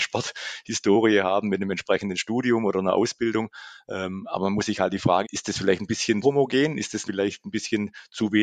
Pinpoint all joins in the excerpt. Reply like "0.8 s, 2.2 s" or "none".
5.2 s, 6.2 s, 7.0 s